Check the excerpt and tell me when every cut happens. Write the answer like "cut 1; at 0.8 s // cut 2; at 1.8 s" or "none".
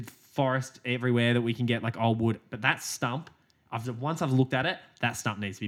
none